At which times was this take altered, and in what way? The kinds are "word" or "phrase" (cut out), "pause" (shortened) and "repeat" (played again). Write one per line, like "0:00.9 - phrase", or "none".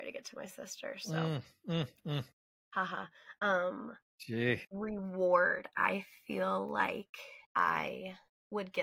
0:07.4 - pause